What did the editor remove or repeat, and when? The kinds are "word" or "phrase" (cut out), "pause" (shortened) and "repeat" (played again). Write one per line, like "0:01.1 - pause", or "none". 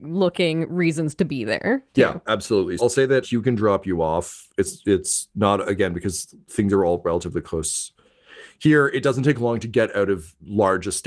0:02.8 - word
0:03.2 - word

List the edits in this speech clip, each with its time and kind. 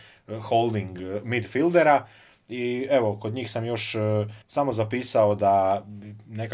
0:04.4 - pause

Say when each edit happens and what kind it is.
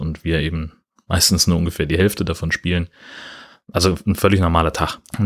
none

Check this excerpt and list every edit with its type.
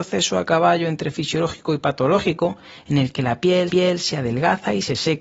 0:03.7 - repeat

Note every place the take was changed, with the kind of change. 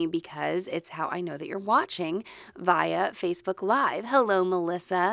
none

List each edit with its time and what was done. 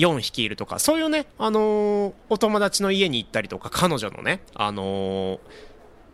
0:02.2 - pause

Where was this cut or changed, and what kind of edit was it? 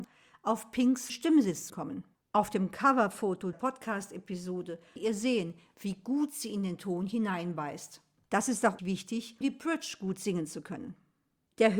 0:01.1 - word
0:01.7 - word
0:03.5 - word
0:05.0 - word
0:08.8 - word
0:09.4 - word

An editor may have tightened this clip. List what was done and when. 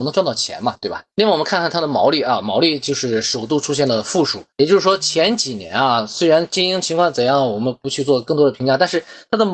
0:01.1 - pause
0:04.5 - pause

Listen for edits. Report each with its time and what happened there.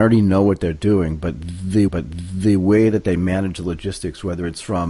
0:01.9 - repeat

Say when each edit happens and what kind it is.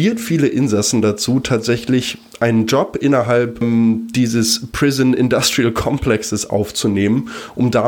none

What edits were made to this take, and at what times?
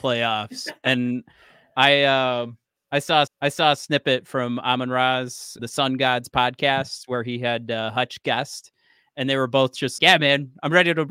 0:03.3 - repeat
0:05.6 - word
0:10.0 - word

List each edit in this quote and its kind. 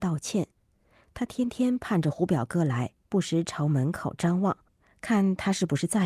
0:03.0 - pause

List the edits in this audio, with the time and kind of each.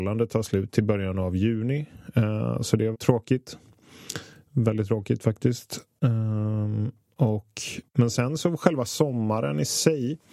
0:02.9 - word

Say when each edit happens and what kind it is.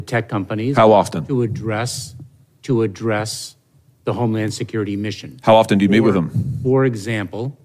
none

